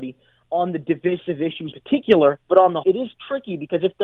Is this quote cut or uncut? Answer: cut